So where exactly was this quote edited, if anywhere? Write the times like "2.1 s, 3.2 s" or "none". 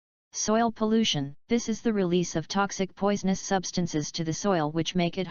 1.4 s